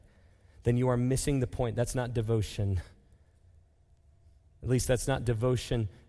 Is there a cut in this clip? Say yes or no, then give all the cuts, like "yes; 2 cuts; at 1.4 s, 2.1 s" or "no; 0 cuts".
no; 0 cuts